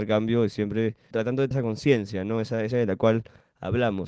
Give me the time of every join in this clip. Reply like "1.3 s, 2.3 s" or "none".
1.1 s, 1.5 s, 2.7 s